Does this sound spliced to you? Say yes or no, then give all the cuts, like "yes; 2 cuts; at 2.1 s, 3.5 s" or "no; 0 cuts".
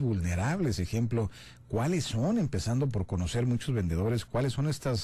no; 0 cuts